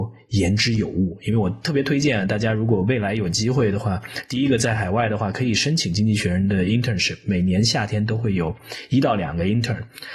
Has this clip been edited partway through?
no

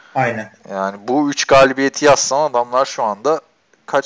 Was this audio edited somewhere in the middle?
no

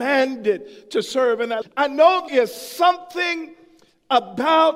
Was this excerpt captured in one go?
no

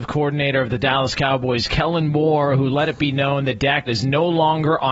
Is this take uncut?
no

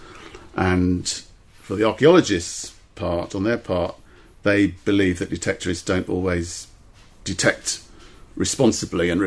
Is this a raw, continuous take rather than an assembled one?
yes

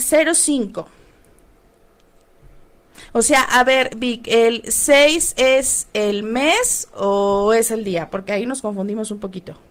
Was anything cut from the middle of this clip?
no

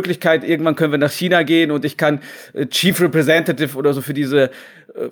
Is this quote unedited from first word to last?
yes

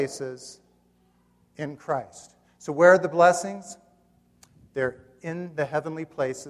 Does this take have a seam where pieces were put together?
no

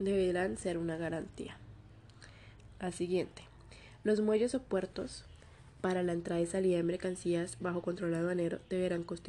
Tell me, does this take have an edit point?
no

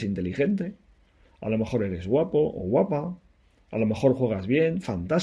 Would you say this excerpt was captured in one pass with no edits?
yes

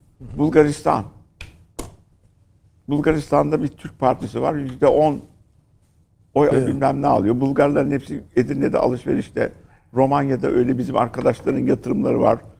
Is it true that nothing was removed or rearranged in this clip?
no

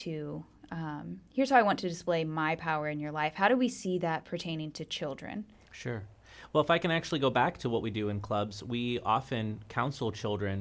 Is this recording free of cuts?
no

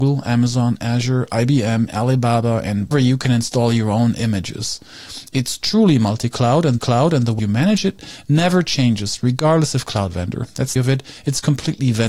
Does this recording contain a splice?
yes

